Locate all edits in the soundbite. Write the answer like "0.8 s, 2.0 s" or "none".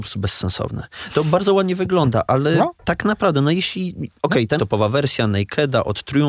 2.7 s, 4.2 s, 4.6 s